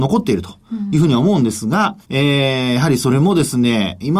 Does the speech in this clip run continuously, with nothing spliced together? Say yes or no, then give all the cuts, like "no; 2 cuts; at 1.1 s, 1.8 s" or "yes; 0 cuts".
no; 1 cut; at 2.0 s